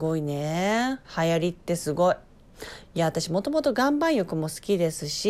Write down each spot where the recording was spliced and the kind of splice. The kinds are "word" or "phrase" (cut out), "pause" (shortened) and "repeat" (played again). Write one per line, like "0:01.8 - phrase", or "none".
0:01.0 - pause